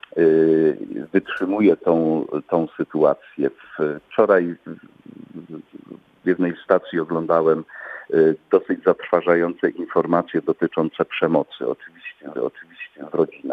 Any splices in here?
yes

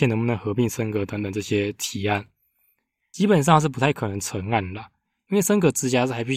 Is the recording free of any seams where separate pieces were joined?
yes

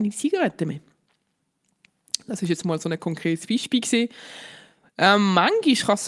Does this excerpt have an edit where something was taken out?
no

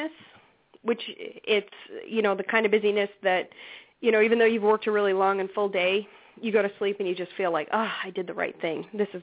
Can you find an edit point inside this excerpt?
no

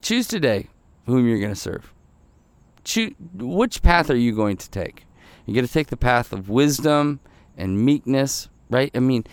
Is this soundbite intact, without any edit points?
yes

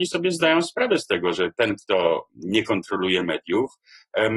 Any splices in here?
no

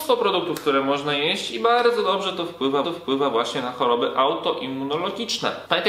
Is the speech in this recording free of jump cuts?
no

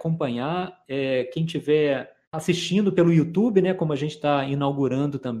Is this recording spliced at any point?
yes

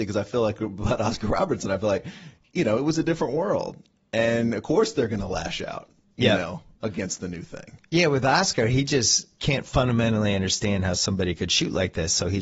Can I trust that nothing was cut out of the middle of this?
yes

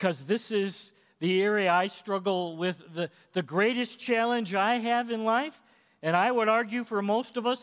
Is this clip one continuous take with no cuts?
yes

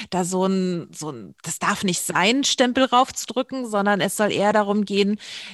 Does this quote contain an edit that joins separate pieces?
no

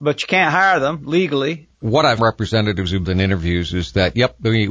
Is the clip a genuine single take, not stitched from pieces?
no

